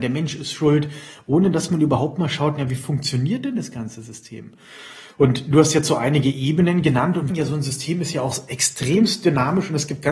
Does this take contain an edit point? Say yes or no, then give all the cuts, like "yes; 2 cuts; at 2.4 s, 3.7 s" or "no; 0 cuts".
yes; 1 cut; at 7.3 s